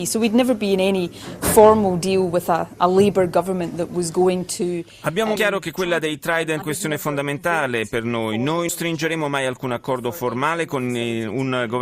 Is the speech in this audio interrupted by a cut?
yes; 3 cuts; at 5.4 s, 6.6 s, 8.7 s

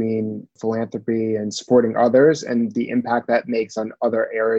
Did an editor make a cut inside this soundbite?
no; 0 cuts

